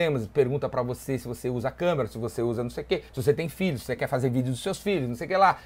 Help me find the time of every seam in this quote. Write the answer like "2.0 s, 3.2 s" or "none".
3.1 s